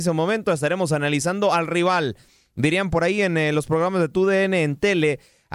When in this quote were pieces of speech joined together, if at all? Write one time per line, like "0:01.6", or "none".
none